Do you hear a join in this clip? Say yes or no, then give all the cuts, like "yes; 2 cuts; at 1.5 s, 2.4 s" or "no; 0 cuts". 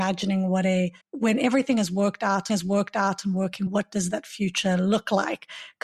yes; 3 cuts; at 1.0 s, 2.5 s, 3.7 s